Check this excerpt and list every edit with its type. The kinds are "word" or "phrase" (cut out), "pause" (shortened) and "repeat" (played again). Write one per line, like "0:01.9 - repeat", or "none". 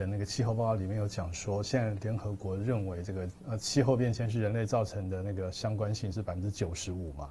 0:03.4 - pause